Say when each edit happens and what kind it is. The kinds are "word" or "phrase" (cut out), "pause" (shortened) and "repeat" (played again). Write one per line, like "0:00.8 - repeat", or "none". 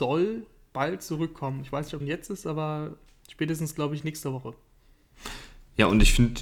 0:02.0 - word